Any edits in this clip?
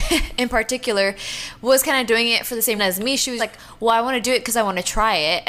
yes; 2 cuts; at 2.8 s, 3.4 s

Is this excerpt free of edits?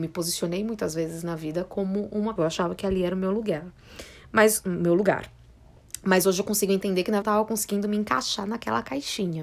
no; 2 cuts; at 2.4 s, 7.2 s

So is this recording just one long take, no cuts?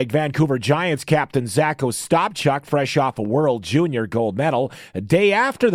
yes; 0 cuts

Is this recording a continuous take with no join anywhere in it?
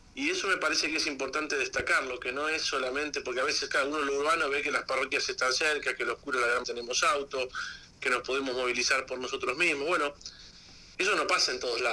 no; 1 cut; at 6.6 s

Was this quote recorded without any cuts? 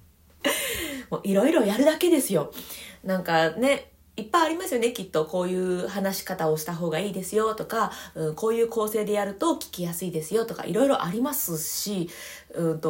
yes; 0 cuts

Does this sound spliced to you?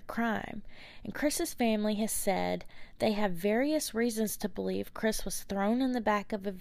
no; 0 cuts

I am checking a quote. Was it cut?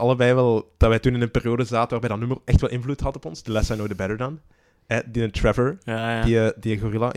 no; 0 cuts

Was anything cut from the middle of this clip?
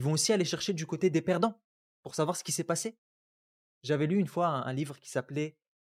yes; 1 cut; at 1.7 s

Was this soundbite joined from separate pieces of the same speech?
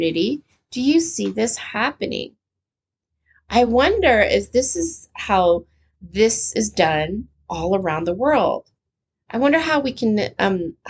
no; 0 cuts

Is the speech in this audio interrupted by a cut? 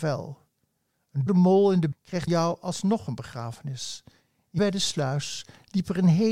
yes; 4 cuts; at 1.3 s, 1.9 s, 2.3 s, 4.6 s

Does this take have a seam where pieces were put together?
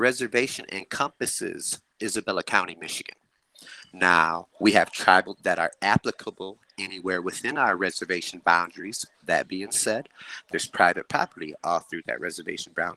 yes; 3 cuts; at 2.0 s, 5.3 s, 9.1 s

